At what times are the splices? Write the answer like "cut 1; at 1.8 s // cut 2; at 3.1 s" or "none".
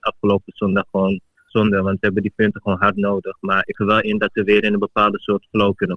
cut 1; at 1.5 s // cut 2; at 3.7 s